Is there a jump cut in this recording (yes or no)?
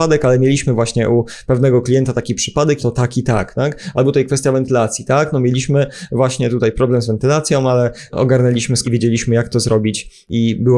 yes